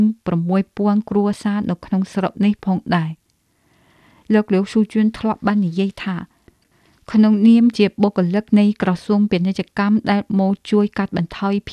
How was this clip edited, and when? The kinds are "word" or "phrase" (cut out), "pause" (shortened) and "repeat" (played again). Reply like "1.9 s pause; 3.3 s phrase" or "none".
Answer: none